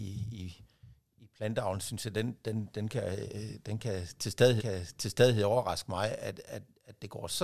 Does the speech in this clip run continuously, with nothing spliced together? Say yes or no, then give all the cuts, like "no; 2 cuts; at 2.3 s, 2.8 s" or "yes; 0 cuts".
no; 1 cut; at 4.6 s